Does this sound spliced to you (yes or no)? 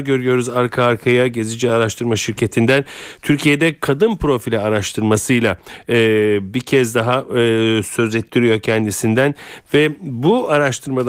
no